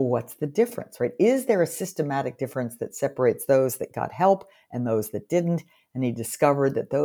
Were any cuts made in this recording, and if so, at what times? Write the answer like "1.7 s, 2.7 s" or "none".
none